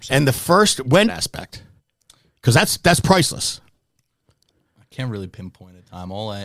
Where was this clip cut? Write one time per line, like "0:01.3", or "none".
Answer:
0:01.1